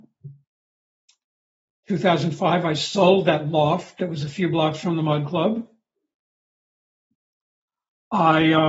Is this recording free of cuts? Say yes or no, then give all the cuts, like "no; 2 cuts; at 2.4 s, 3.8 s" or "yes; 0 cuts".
yes; 0 cuts